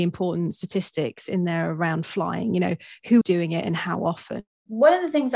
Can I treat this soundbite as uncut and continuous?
no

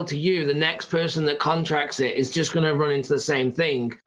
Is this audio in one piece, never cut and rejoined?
yes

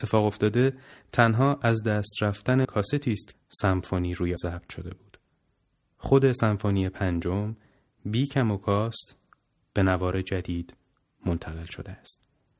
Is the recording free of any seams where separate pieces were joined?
no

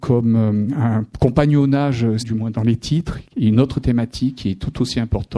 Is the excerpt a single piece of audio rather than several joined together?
no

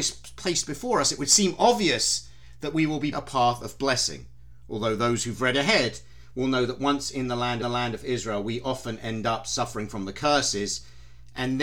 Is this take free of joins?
no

